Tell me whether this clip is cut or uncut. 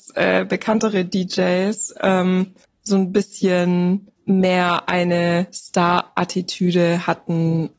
cut